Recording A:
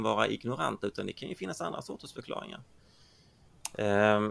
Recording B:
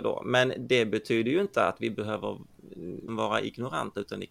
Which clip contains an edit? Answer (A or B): B